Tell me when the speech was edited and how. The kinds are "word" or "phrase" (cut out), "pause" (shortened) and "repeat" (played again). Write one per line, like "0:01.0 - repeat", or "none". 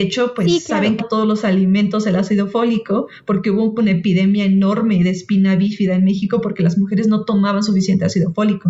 0:01.0 - phrase